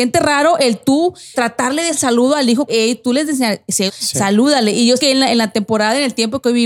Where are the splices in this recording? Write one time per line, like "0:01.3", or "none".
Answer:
0:01.3
0:01.9
0:02.7
0:03.3
0:03.9
0:05.0